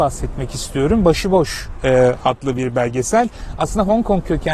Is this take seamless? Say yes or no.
yes